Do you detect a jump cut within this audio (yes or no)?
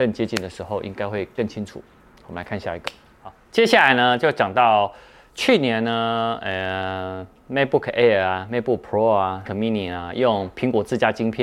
yes